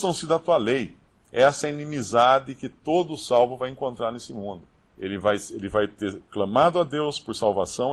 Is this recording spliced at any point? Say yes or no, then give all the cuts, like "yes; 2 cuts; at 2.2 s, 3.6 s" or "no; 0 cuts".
no; 0 cuts